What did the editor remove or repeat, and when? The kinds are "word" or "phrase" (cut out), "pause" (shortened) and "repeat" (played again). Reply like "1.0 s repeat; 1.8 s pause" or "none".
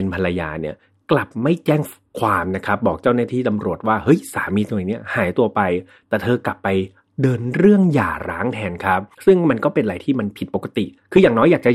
9.1 s pause